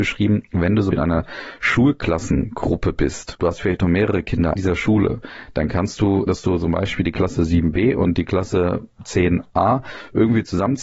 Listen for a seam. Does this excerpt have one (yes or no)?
yes